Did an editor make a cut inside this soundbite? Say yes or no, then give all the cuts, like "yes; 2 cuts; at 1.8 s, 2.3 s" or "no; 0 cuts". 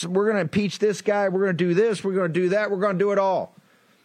no; 0 cuts